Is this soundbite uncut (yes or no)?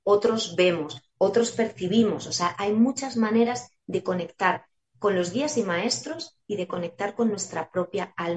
yes